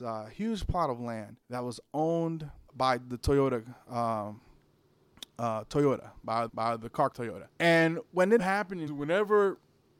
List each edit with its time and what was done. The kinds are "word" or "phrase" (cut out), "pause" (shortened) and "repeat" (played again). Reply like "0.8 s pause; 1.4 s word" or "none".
1.4 s pause; 2.7 s word; 6.5 s repeat; 7.1 s word; 7.5 s pause; 8.4 s word; 8.9 s word